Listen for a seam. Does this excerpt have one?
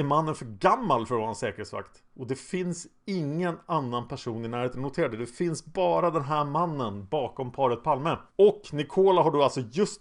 yes; 1 cut; at 8.3 s

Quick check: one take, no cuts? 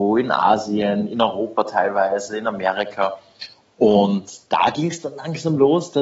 yes; 0 cuts

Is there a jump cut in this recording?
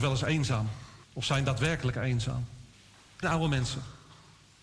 yes; 3 cuts; at 1.0 s, 2.7 s, 3.2 s

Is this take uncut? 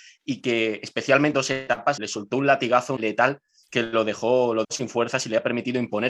no; 4 cuts; at 1.3 s, 2.0 s, 3.0 s, 4.6 s

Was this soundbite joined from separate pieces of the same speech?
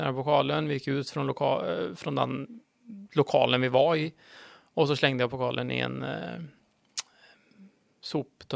no; 0 cuts

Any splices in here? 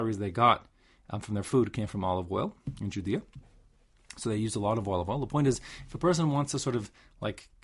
no; 0 cuts

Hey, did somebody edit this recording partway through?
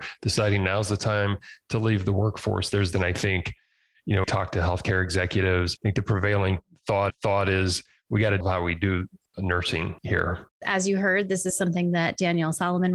yes; 6 cuts; at 2.9 s, 4.2 s, 5.8 s, 7.1 s, 8.4 s, 10.5 s

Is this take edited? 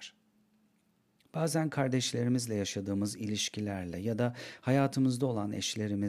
no; 0 cuts

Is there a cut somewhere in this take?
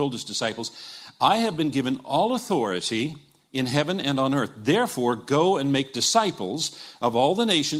no; 0 cuts

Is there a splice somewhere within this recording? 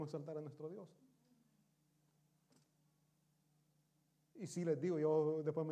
no; 0 cuts

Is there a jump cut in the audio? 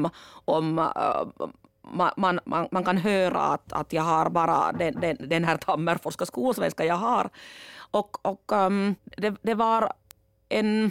yes; 2 cuts; at 4.9 s, 9.0 s

